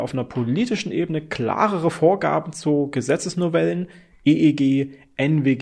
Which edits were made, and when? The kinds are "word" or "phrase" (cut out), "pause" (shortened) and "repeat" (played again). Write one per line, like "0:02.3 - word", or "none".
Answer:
none